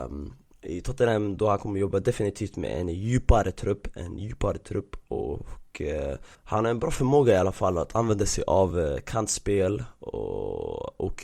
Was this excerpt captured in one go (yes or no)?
yes